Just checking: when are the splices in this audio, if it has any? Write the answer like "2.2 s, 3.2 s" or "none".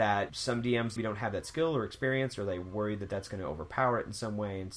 1.0 s